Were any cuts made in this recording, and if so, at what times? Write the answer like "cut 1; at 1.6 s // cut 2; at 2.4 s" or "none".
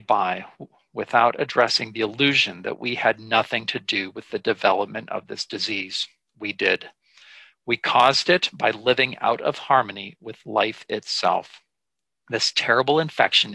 none